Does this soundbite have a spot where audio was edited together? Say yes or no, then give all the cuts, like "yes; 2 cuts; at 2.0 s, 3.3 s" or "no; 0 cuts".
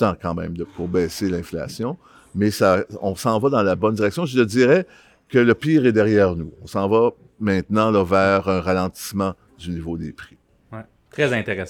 no; 0 cuts